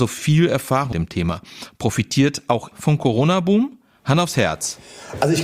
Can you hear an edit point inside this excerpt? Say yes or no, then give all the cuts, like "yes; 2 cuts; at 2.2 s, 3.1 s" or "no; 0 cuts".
yes; 2 cuts; at 0.9 s, 2.7 s